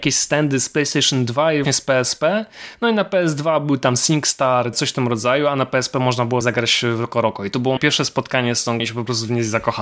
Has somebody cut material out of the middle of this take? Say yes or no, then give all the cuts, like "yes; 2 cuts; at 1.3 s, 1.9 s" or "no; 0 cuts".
yes; 5 cuts; at 1.6 s, 4.7 s, 6.4 s, 7.8 s, 8.8 s